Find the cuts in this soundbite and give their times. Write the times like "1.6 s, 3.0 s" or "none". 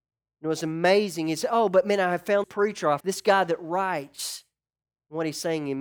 2.4 s, 3.0 s